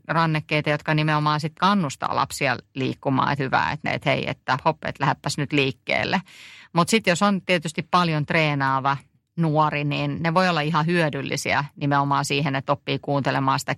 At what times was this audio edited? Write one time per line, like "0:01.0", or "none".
0:01.6
0:03.4
0:03.9
0:04.6

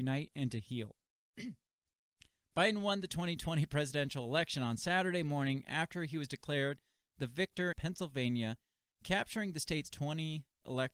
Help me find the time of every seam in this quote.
0:07.7

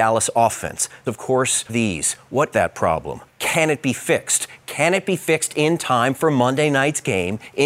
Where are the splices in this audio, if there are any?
0:01.1
0:01.7
0:02.5
0:03.3

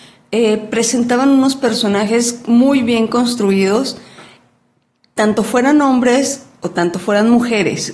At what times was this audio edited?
none

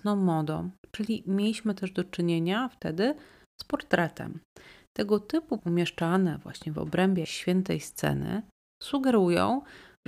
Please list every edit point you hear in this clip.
0:05.6
0:07.2

